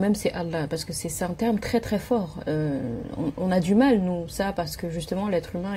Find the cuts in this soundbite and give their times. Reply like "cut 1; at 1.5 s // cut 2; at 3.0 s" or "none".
none

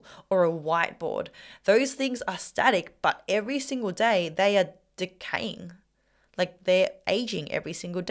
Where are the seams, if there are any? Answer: none

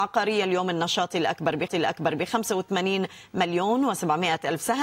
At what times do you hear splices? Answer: cut 1; at 1.7 s

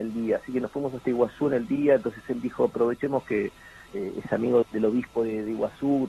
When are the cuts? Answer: cut 1; at 3.9 s // cut 2; at 4.6 s

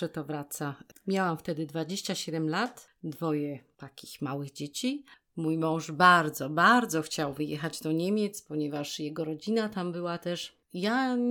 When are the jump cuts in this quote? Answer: none

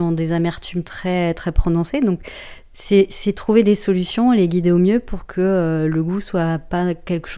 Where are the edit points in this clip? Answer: none

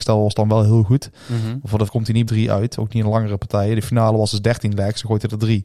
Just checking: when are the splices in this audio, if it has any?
cut 1; at 1.9 s // cut 2; at 2.3 s

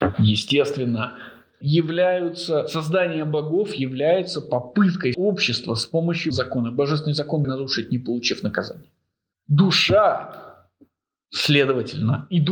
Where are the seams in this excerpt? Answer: cut 1; at 1.6 s // cut 2; at 5.1 s // cut 3; at 6.3 s // cut 4; at 7.4 s

